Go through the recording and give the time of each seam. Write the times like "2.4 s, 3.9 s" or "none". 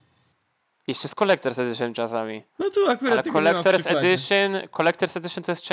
2.5 s